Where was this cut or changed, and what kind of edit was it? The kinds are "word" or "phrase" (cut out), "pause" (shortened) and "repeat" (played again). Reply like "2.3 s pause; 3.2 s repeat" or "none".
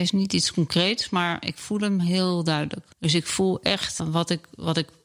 2.9 s pause; 4.0 s word